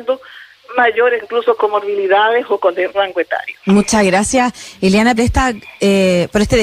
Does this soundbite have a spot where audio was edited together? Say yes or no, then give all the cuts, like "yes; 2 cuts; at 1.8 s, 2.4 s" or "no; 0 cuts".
yes; 5 cuts; at 1.2 s, 1.6 s, 2.9 s, 3.6 s, 5.2 s